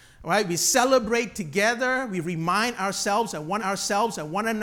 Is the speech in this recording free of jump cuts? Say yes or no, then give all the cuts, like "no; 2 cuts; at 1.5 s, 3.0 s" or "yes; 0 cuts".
no; 1 cut; at 3.6 s